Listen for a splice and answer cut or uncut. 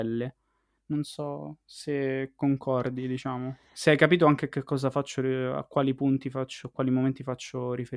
uncut